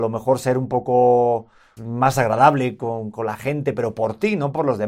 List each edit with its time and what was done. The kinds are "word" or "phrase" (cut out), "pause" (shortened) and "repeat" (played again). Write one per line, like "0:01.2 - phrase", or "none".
0:01.8 - word